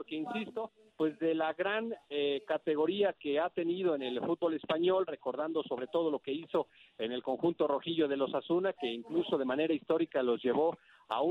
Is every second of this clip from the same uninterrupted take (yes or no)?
yes